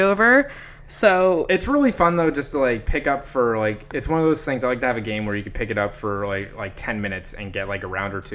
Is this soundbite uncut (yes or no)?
yes